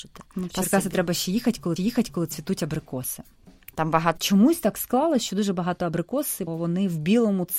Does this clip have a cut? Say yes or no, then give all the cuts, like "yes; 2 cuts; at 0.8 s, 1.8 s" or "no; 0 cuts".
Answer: yes; 3 cuts; at 1.8 s, 4.2 s, 6.5 s